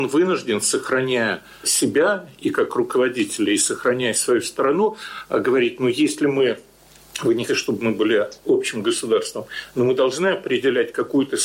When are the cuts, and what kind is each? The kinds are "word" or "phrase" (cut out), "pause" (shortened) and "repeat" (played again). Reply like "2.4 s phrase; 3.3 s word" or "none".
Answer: 7.5 s word